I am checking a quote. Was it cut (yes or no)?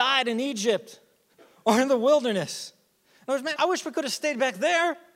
yes